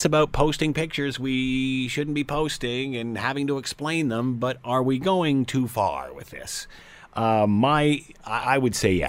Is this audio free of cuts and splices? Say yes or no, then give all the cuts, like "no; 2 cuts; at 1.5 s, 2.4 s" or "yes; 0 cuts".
yes; 0 cuts